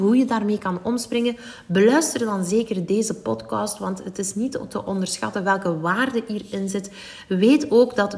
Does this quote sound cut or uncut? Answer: uncut